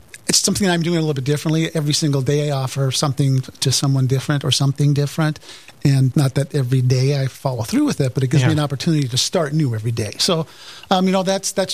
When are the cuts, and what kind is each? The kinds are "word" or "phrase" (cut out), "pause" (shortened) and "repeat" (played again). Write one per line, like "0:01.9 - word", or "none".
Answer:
0:06.1 - word

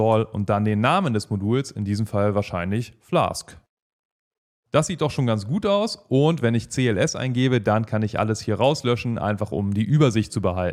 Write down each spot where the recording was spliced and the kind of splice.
none

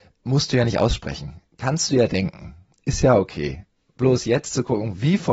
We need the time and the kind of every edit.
none

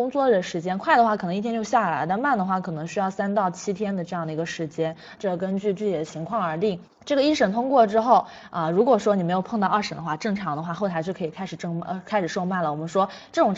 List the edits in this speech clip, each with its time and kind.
0:06.8 - pause

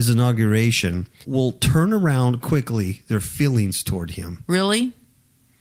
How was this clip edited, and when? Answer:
0:01.2 - word
0:02.4 - word

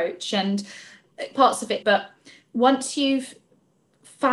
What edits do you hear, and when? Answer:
0:01.3 - word
0:01.8 - phrase

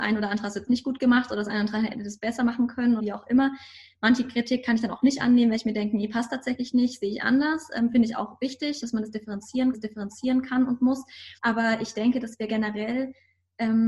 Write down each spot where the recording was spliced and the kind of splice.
0:03.0 - word
0:08.8 - word
0:09.7 - repeat
0:11.4 - pause

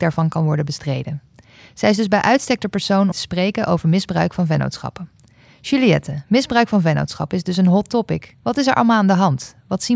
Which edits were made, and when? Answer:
0:03.1 - word
0:08.4 - pause

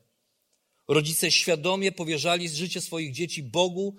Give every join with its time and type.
none

